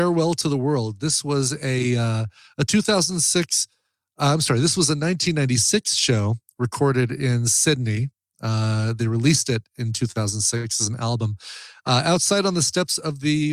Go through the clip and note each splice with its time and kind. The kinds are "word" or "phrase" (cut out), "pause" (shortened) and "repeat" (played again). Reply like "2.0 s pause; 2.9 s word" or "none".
none